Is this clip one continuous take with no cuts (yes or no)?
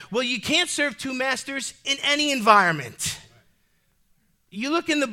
yes